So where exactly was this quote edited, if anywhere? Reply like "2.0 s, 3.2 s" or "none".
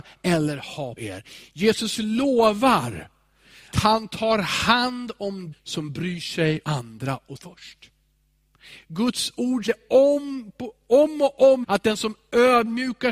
1.0 s, 3.7 s, 5.5 s, 6.6 s, 7.4 s, 9.7 s, 11.6 s